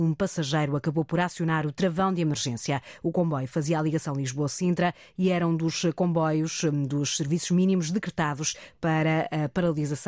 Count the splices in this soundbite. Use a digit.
0